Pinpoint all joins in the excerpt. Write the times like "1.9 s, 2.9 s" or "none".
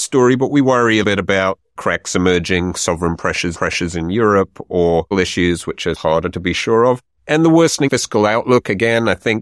1.0 s, 3.5 s, 5.1 s, 7.9 s